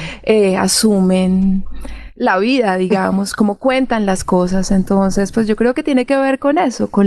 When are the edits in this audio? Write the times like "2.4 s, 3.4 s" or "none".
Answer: none